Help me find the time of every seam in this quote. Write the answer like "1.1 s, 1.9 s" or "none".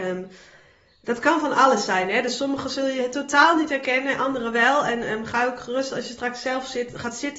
none